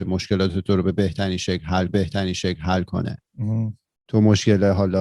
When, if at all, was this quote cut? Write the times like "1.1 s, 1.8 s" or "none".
1.9 s